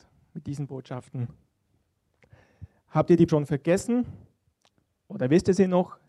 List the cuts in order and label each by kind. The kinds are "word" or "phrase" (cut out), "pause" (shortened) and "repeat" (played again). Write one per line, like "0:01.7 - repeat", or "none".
0:03.3 - word